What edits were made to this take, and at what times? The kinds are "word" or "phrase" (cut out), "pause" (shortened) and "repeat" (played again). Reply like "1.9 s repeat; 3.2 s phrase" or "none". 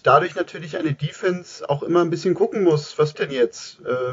3.1 s word